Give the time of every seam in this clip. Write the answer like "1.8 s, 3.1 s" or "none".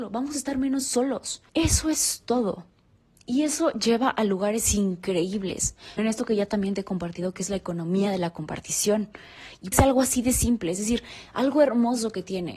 1.5 s, 6.0 s, 9.7 s